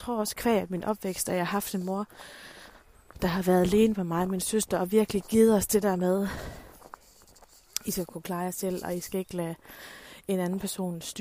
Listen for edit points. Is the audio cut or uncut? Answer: uncut